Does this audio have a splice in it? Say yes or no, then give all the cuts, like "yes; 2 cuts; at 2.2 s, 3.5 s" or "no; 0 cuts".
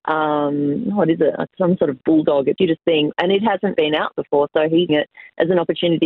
yes; 4 cuts; at 2.6 s, 3.7 s, 4.1 s, 4.9 s